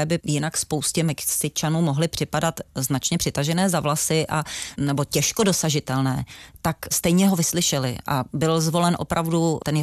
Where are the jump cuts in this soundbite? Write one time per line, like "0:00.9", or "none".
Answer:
none

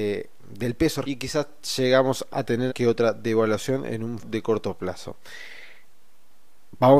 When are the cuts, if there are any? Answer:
0:01.0
0:02.3
0:02.7
0:04.2

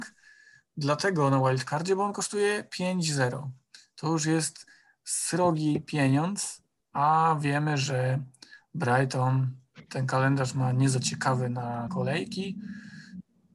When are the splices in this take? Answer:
0:11.9

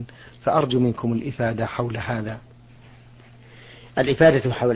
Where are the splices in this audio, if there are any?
none

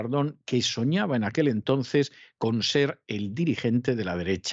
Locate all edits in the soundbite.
none

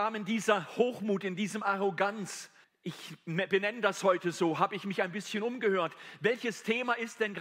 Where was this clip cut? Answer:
0:02.6

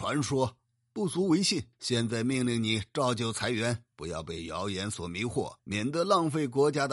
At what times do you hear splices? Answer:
0:01.7
0:03.9
0:05.6

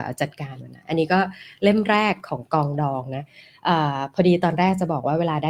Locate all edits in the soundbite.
none

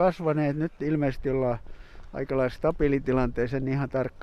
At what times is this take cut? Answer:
none

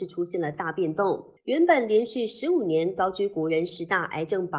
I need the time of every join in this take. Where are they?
0:01.4

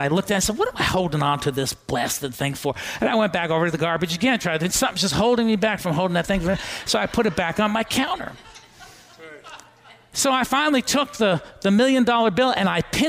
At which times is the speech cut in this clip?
none

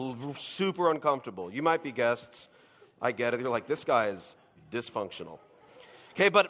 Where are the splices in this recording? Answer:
none

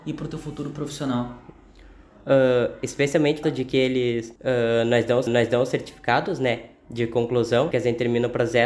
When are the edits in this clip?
0:03.4
0:04.4
0:05.3
0:07.7

